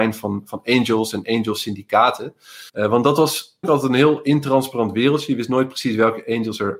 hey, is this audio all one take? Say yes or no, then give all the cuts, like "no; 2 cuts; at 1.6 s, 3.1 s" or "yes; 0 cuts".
no; 2 cuts; at 2.7 s, 3.6 s